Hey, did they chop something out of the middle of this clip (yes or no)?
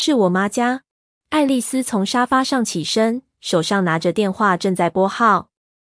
yes